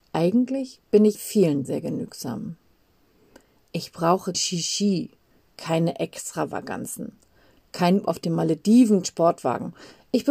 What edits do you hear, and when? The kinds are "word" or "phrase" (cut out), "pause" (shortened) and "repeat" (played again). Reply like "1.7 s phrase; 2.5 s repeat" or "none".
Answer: 1.1 s word; 1.6 s word; 4.3 s word; 8.0 s word; 9.0 s word